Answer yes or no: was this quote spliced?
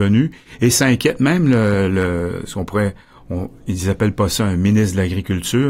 no